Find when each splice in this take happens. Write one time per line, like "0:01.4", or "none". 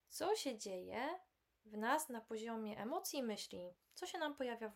0:01.4